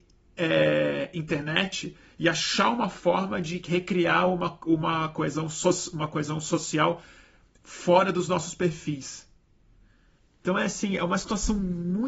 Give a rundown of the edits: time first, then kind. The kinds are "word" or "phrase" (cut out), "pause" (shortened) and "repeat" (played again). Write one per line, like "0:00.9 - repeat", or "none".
none